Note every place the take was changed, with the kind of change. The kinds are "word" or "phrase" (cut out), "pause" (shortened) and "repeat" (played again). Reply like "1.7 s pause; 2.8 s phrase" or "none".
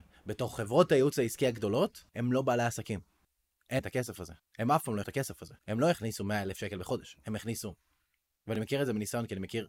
2.1 s pause; 3.8 s word; 4.4 s pause; 5.0 s word; 5.6 s pause